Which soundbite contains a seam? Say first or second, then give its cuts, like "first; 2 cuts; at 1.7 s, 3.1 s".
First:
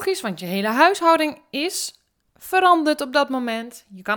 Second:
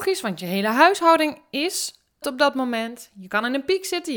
second; 1 cut; at 2.2 s